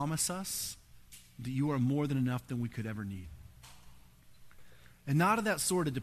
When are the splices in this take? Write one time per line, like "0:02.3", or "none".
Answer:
none